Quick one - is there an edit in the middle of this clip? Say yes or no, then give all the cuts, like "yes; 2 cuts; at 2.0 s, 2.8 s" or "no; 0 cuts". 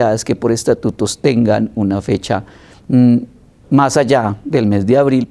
no; 0 cuts